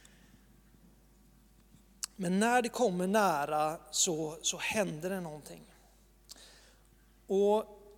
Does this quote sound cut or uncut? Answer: uncut